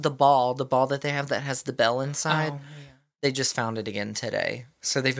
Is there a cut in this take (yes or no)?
no